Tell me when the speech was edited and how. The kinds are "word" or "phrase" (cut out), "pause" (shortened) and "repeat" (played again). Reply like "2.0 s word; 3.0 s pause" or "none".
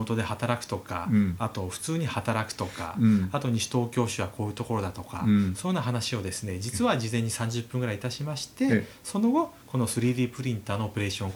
none